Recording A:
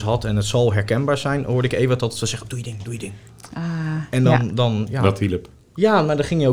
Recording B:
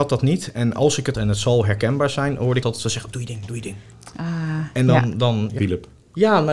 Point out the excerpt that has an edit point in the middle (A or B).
B